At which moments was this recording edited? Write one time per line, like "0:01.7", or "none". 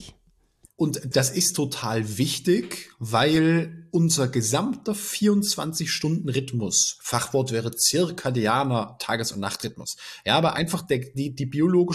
0:01.1